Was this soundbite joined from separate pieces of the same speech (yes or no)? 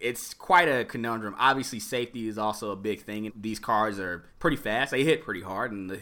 yes